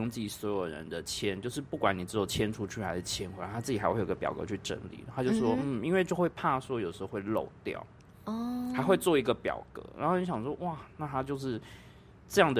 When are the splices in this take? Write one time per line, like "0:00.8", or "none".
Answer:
none